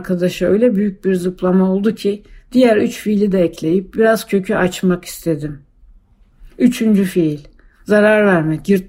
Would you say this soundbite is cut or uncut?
uncut